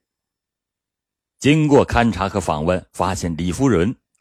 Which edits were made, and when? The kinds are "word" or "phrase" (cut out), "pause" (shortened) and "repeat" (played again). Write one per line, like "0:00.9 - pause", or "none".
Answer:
0:02.9 - pause